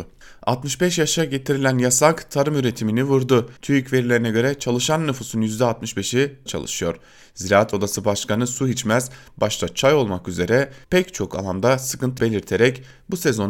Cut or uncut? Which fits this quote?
cut